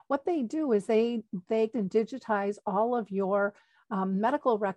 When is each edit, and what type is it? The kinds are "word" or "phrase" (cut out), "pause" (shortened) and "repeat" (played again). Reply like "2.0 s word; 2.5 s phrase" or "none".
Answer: 1.7 s word